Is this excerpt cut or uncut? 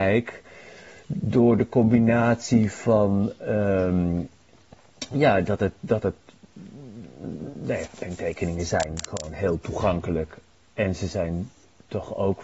uncut